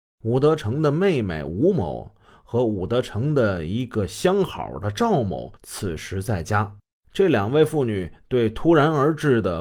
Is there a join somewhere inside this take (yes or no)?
yes